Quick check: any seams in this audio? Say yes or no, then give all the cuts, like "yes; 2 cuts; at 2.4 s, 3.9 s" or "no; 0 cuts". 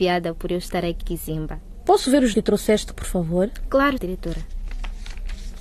yes; 4 cuts; at 1.0 s, 2.3 s, 2.9 s, 4.0 s